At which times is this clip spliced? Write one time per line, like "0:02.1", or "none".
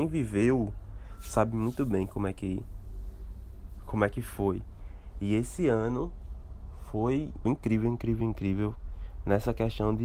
0:07.4
0:08.2